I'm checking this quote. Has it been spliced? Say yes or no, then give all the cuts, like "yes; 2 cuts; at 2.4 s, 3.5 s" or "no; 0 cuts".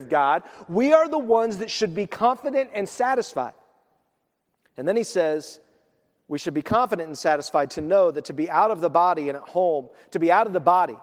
no; 0 cuts